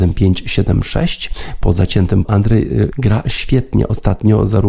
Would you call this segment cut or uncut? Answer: cut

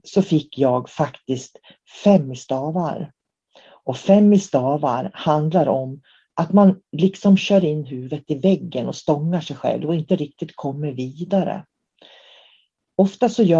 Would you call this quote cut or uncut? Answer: uncut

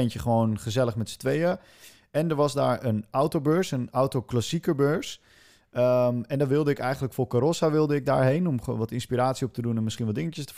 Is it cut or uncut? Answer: uncut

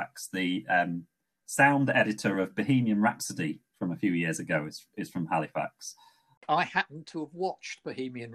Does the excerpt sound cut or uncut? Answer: uncut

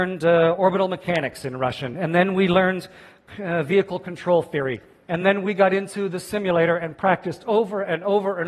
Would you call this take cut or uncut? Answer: uncut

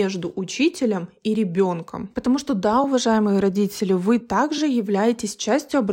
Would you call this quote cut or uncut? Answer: uncut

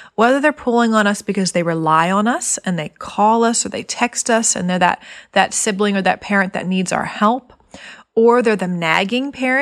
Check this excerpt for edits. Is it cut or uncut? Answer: uncut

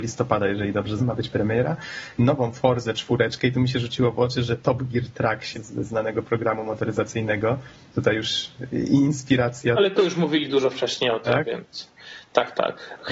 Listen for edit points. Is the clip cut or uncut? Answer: cut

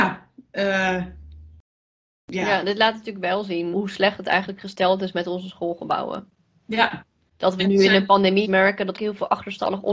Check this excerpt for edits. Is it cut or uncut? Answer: cut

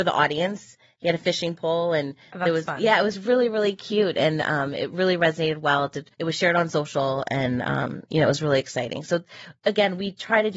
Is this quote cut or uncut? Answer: cut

